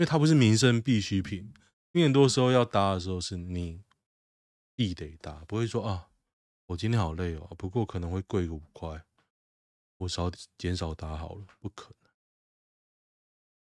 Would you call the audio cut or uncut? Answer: uncut